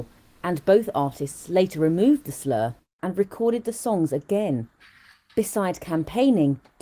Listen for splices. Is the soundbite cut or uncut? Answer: uncut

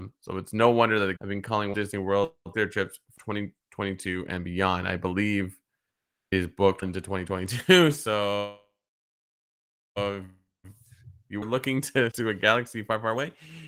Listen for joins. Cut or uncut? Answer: cut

